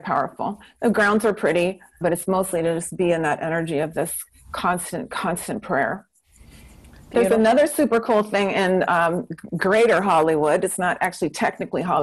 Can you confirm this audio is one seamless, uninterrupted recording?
no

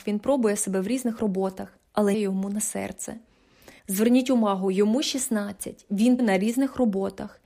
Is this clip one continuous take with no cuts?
no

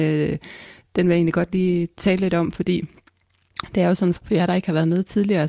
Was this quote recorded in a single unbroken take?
no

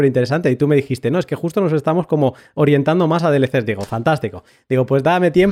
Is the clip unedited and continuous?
yes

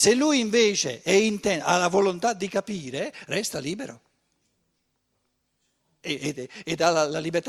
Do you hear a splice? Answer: no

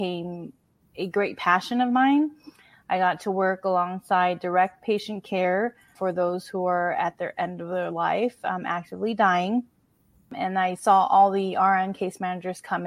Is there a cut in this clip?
no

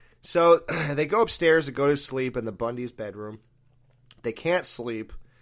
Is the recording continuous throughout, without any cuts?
yes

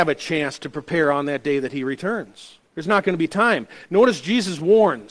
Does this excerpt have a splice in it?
yes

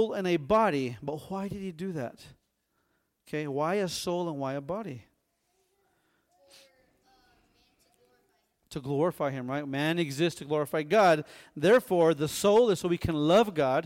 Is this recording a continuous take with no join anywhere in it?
yes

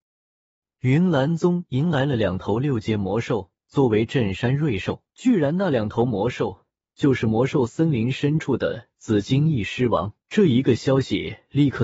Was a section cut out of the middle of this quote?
yes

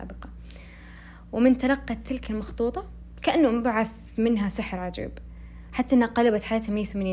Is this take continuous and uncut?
yes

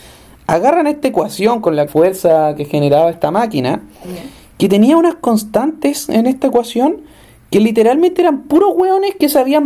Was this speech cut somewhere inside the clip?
yes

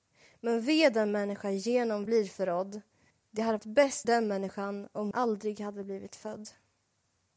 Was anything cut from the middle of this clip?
yes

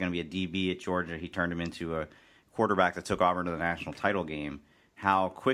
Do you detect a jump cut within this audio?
no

